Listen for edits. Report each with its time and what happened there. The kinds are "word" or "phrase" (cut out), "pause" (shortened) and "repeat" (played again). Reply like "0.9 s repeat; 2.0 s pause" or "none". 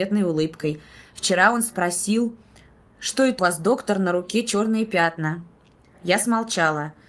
3.4 s word